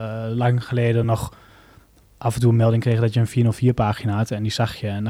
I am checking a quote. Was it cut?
no; 0 cuts

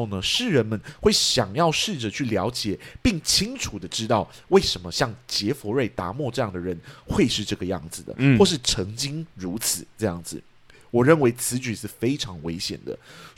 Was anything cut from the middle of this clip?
no; 0 cuts

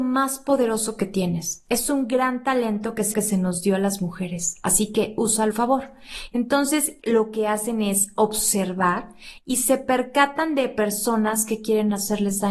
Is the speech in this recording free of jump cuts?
no; 3 cuts; at 3.1 s, 5.5 s, 7.0 s

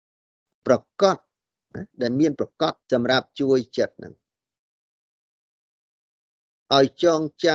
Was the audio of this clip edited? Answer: yes; 1 cut; at 2.8 s

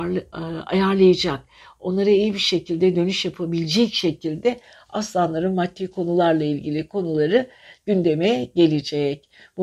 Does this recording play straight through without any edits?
yes; 0 cuts

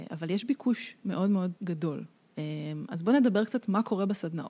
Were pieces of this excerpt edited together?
yes; 1 cut; at 1.6 s

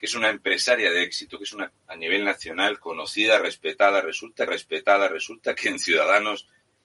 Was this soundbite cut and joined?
yes; 2 cuts; at 1.7 s, 4.5 s

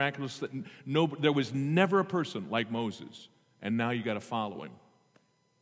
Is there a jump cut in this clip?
no; 0 cuts

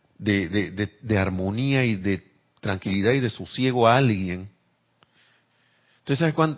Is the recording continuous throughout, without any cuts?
yes; 0 cuts

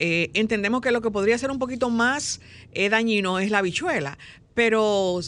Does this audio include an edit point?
no; 0 cuts

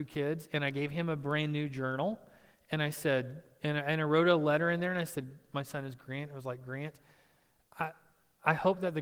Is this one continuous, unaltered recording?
yes; 0 cuts

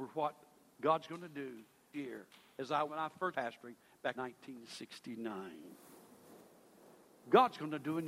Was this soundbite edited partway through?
yes; 4 cuts; at 1.9 s, 2.9 s, 3.3 s, 4.1 s

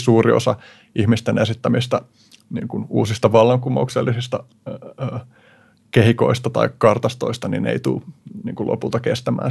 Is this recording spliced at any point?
no; 0 cuts

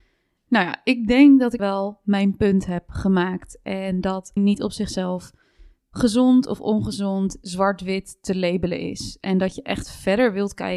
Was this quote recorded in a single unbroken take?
no; 2 cuts; at 1.6 s, 4.4 s

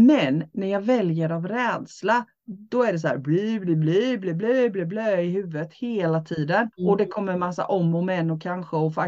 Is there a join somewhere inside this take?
yes; 1 cut; at 6.7 s

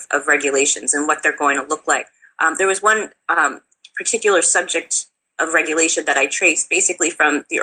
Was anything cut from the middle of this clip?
no; 0 cuts

